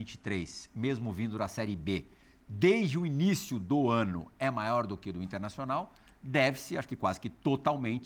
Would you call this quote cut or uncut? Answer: uncut